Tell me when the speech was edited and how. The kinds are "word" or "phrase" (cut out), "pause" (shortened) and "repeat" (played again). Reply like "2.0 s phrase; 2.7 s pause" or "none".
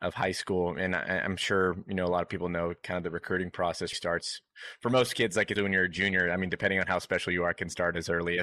3.9 s word; 5.6 s word

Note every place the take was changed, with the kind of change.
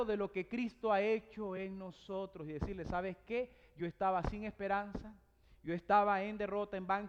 none

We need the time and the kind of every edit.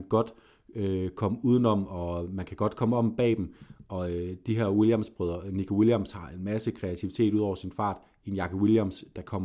none

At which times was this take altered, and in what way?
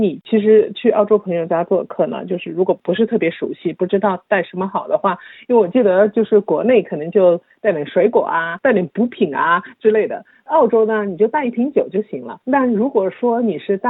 12.4 s pause

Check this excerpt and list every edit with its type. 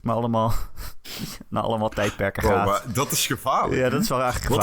none

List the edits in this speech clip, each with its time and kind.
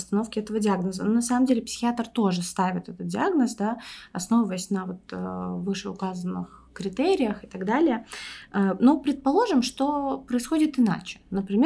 none

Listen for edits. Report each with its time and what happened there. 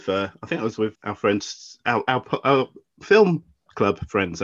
1.0 s word

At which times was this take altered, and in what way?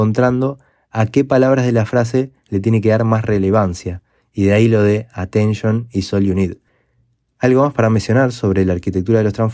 none

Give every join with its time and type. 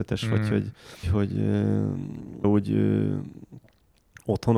1.0 s word; 2.4 s word

